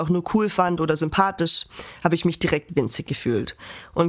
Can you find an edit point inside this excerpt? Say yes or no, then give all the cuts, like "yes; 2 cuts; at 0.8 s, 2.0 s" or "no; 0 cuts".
no; 0 cuts